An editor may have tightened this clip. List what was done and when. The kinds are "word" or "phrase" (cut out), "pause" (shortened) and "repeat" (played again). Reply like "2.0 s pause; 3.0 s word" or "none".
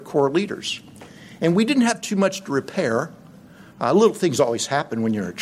none